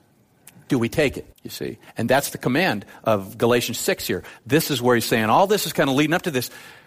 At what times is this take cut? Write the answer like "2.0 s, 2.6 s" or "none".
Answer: 1.3 s

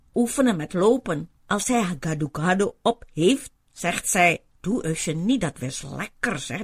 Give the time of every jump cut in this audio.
1.4 s, 4.5 s

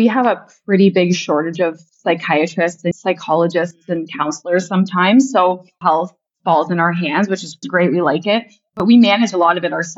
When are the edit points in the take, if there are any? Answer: 2.9 s, 5.8 s, 7.6 s

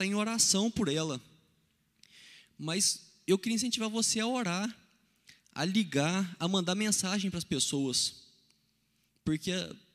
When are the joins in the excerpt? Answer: none

